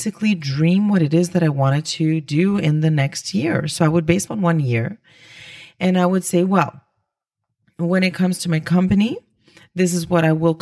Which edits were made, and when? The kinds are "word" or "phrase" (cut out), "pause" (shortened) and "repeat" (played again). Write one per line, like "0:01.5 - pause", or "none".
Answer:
0:04.3 - word